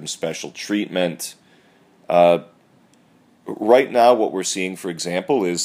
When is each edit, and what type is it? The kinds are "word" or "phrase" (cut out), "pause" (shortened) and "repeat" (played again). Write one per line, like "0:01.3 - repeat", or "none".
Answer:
none